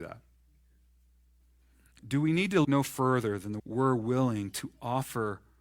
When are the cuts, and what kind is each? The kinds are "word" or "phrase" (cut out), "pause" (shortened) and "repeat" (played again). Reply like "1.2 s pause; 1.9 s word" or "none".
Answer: 2.6 s word; 3.6 s word